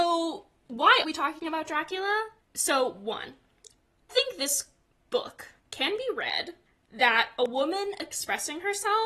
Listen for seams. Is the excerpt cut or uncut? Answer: cut